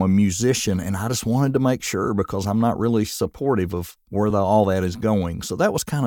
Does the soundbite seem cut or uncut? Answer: uncut